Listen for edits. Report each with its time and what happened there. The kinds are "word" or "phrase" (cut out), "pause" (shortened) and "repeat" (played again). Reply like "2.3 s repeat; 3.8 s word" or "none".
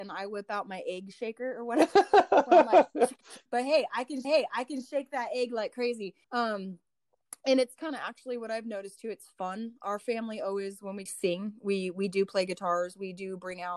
3.5 s pause; 4.2 s repeat; 6.2 s pause; 7.8 s word; 11.1 s phrase